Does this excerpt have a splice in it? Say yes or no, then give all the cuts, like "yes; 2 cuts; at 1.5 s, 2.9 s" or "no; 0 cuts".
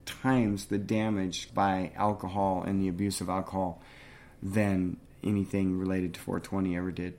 yes; 1 cut; at 1.5 s